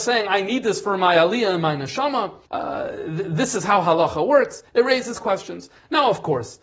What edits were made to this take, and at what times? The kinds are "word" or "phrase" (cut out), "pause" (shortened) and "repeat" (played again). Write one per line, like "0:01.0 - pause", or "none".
0:02.5 - pause